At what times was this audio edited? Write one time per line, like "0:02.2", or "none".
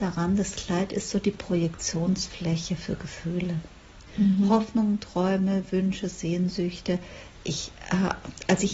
0:04.1